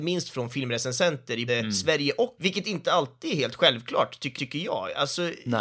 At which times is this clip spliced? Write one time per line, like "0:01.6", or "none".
0:01.5
0:02.4
0:04.4